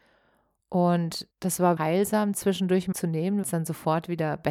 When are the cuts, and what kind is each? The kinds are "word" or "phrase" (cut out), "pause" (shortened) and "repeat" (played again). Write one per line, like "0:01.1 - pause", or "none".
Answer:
0:01.3 - pause
0:01.8 - word
0:02.9 - phrase
0:03.4 - word

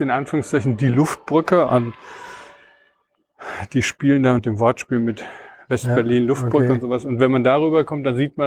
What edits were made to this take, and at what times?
0:01.7 - phrase
0:04.4 - word

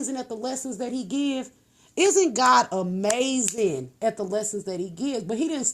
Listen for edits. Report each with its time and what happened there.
none

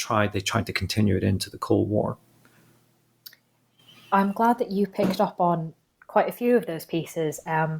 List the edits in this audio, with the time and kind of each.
none

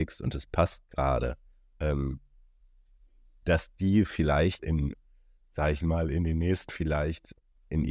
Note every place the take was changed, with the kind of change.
0:04.6 - word
0:06.7 - word

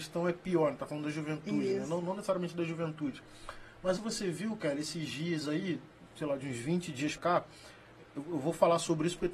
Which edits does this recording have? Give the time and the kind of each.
0:04.0 - phrase
0:07.2 - word

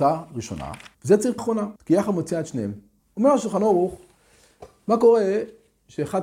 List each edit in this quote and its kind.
0:00.9 - pause
0:01.4 - word
0:01.8 - pause
0:03.0 - pause

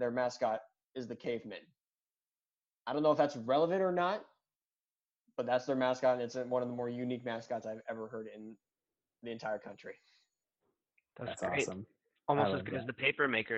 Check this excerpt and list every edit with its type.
none

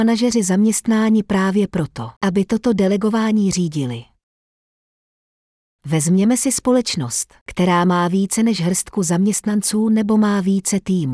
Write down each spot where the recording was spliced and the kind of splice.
none

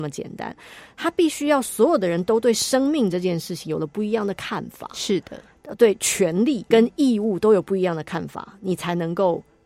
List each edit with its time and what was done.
0:06.7 - word

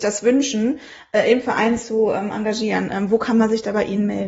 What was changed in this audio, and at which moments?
none

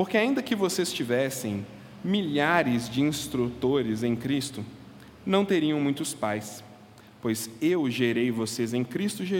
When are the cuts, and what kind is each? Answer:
none

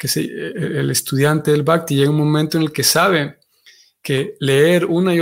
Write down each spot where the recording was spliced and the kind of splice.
none

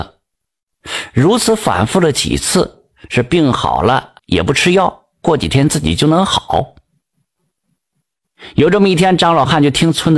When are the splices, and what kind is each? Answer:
0:04.2 - phrase

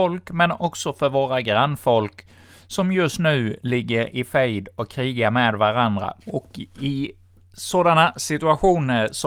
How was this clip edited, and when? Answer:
0:06.2 - pause

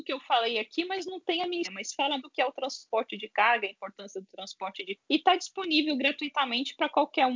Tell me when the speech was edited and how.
0:01.6 - word
0:02.2 - word
0:04.9 - word

